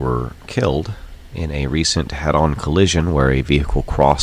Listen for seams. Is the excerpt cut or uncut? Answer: uncut